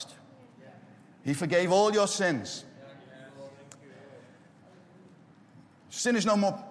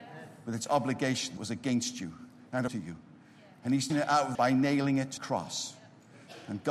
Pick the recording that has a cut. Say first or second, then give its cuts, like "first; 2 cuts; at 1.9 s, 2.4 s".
second; 5 cuts; at 1.4 s, 2.7 s, 3.9 s, 4.3 s, 5.2 s